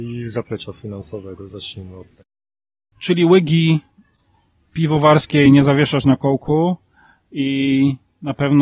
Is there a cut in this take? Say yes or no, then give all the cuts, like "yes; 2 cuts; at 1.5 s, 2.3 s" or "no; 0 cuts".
no; 0 cuts